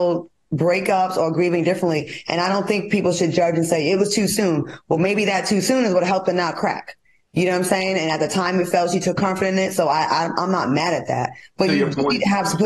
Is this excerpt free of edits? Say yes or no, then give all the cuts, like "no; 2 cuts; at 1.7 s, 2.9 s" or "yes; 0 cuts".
yes; 0 cuts